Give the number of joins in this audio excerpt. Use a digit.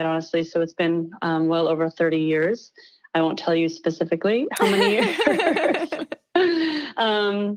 0